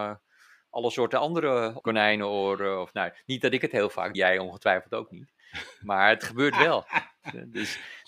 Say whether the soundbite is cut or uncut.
cut